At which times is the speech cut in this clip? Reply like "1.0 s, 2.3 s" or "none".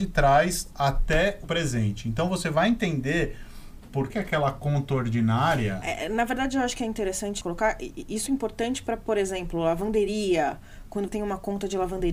1.4 s, 4.1 s, 7.4 s, 8.3 s, 11.1 s

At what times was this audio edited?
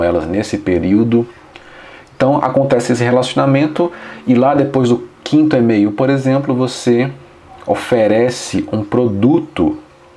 none

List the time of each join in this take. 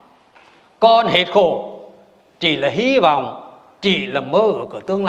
none

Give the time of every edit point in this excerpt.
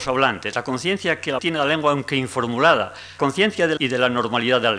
1.4 s, 3.2 s, 3.8 s

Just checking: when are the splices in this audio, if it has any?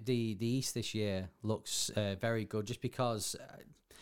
none

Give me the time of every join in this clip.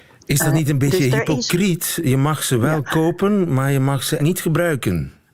4.2 s

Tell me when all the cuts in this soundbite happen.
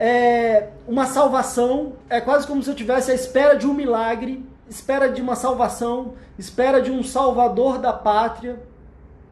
2.0 s, 4.6 s

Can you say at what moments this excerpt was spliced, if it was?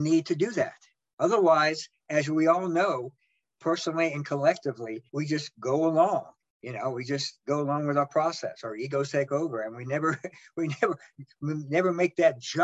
5.1 s

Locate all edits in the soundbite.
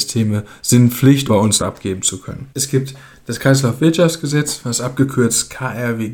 1.3 s, 1.6 s

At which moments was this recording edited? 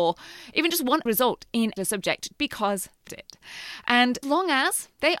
1.1 s, 1.8 s, 2.3 s, 3.1 s, 4.2 s

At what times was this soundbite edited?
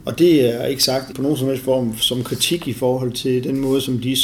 1.1 s

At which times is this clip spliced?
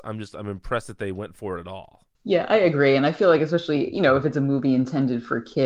2.1 s

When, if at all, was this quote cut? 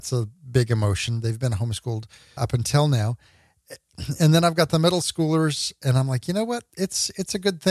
2.4 s

